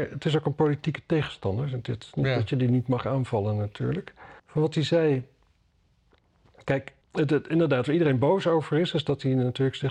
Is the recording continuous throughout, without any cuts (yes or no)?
no